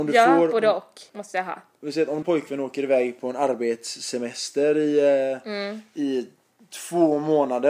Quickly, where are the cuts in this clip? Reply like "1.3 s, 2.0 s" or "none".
1.1 s, 2.2 s